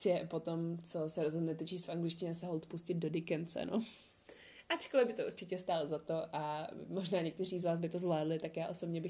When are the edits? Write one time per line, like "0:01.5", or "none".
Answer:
none